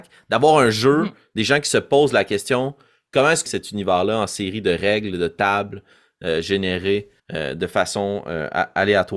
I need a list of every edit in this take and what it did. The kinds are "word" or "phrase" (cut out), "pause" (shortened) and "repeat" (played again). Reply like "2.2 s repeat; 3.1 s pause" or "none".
3.5 s phrase; 7.2 s pause